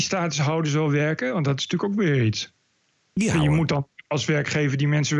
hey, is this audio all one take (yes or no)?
yes